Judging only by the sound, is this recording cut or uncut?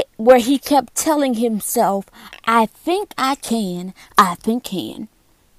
cut